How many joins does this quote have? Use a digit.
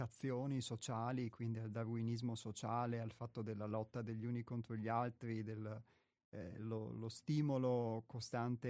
0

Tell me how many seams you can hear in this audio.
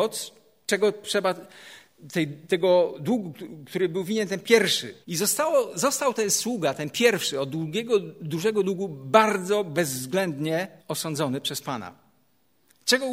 2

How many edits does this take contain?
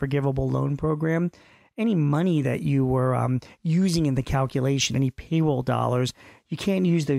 0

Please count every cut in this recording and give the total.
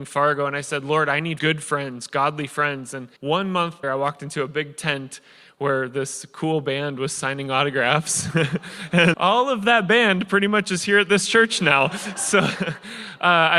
4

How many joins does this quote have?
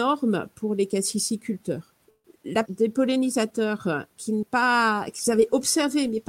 2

